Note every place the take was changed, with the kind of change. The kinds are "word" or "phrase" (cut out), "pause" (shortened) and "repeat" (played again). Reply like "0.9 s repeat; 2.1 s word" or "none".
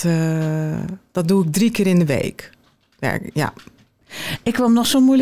none